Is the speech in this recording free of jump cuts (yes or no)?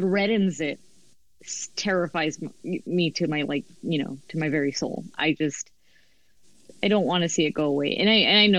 yes